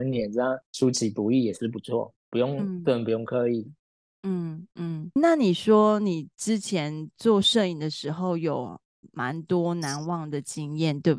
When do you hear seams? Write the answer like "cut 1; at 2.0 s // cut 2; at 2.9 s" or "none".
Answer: cut 1; at 5.2 s